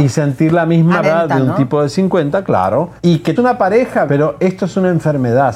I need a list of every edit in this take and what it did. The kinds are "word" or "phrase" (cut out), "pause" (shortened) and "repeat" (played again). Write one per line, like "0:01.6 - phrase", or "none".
0:01.0 - phrase
0:03.0 - pause
0:03.4 - word
0:04.1 - word